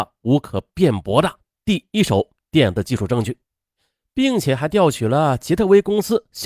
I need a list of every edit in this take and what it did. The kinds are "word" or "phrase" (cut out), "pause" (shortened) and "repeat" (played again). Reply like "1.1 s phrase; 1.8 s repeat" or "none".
none